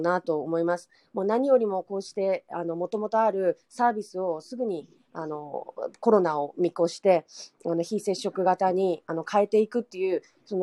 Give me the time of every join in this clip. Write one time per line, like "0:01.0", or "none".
none